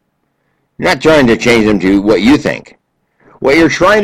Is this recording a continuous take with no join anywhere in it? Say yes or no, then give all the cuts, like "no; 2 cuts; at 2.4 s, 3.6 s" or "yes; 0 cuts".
yes; 0 cuts